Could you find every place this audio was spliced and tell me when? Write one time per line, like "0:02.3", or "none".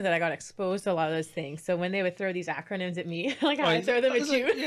none